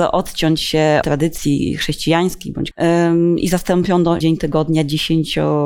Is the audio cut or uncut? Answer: cut